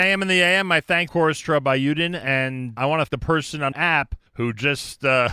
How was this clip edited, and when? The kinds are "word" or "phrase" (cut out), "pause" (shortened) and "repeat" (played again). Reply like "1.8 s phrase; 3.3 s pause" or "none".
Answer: 1.1 s word; 2.8 s word; 3.1 s word; 3.7 s word; 4.3 s pause